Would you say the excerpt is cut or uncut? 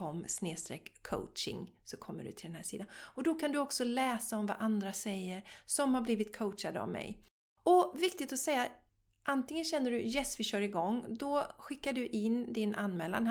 uncut